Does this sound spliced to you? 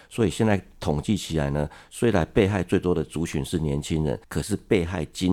yes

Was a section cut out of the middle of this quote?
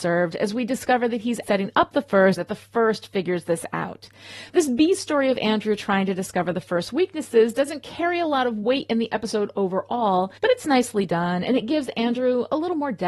yes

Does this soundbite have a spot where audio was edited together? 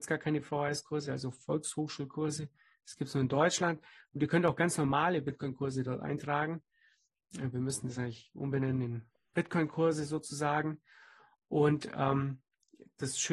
no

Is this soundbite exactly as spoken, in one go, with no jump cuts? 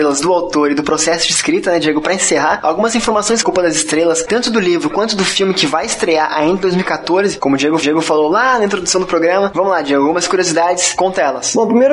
no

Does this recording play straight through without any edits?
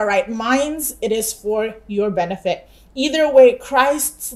yes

